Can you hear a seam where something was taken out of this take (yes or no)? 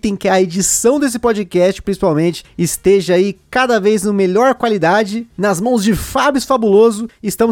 no